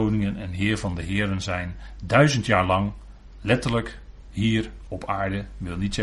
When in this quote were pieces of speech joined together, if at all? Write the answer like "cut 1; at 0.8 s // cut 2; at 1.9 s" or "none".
none